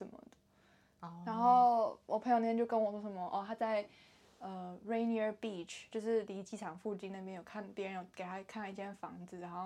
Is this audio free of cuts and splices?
yes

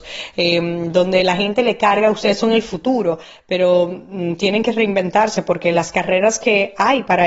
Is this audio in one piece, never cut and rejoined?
yes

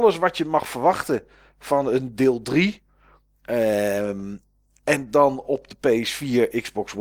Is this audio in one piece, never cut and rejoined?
yes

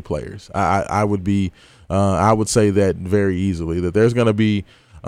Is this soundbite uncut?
yes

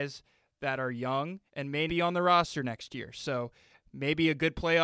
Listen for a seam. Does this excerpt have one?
yes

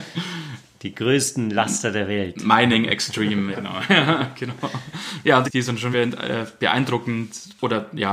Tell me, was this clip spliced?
yes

